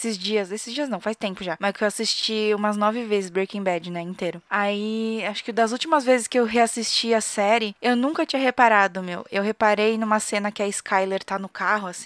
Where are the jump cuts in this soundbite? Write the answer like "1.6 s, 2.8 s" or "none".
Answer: none